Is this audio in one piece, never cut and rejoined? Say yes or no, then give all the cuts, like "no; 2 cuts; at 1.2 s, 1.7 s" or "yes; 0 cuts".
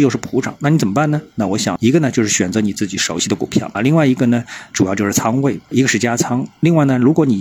no; 1 cut; at 3.7 s